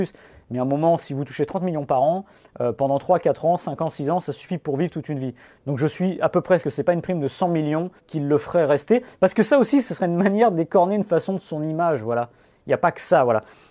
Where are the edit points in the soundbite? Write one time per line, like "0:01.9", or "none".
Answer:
0:06.6
0:08.0

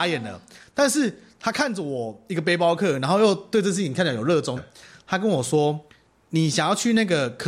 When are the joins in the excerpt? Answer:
0:04.6
0:05.9

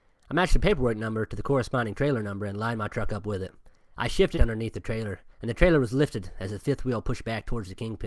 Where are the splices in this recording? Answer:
0:04.3
0:05.3

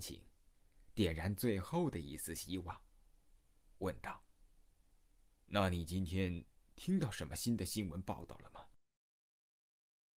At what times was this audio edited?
0:04.3

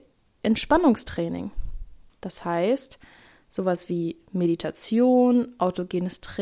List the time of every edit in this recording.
none

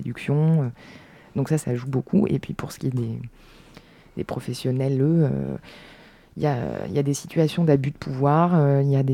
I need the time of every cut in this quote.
0:01.6

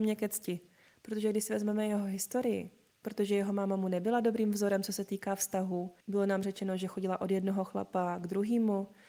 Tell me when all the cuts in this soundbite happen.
0:02.9
0:06.0

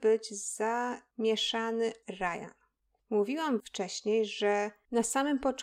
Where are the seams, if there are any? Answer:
0:02.0
0:03.6

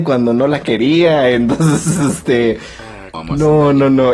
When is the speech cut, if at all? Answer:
0:03.1

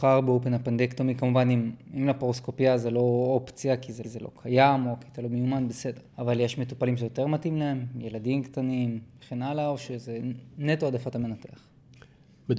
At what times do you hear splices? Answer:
0:04.0
0:06.1

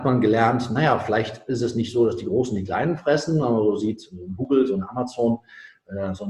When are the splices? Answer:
none

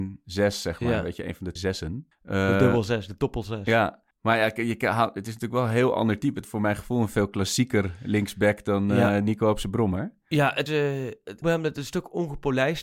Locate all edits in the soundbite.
0:01.6
0:02.1
0:04.1
0:06.4
0:10.7
0:11.4

